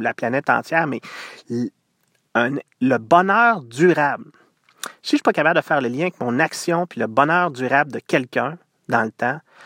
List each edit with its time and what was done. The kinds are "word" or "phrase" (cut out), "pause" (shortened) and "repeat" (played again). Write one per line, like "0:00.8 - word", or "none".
none

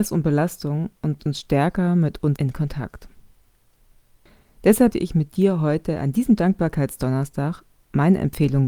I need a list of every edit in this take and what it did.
0:01.2 - word
0:02.4 - word
0:04.9 - word

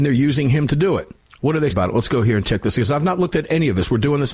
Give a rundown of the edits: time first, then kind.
0:01.2 - pause
0:01.7 - word

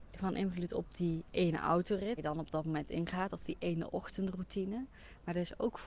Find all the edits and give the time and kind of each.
0:02.2 - word

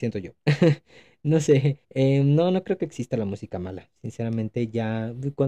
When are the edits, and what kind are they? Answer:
0:01.8 - pause

